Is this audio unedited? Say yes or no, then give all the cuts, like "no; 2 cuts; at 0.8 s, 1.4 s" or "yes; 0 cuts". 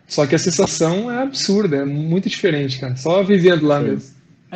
yes; 0 cuts